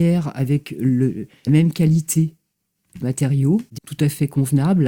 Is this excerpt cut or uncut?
cut